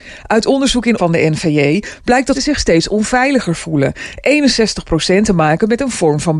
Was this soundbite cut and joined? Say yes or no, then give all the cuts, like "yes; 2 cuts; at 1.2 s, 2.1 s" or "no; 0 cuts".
yes; 3 cuts; at 1.0 s, 2.3 s, 5.2 s